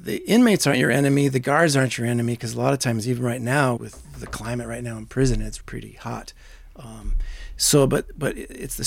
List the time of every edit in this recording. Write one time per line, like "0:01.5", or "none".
0:03.8
0:05.6